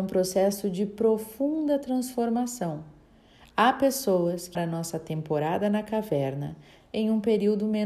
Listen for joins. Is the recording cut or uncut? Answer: cut